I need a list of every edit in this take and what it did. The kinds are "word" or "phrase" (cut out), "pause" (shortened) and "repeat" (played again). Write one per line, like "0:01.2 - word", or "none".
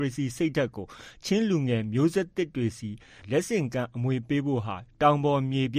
none